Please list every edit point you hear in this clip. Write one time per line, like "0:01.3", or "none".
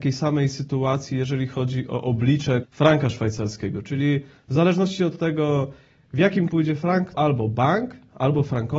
0:02.6
0:06.5
0:07.1